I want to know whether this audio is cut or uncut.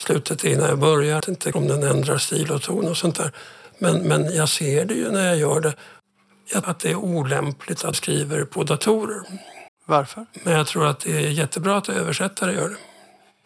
cut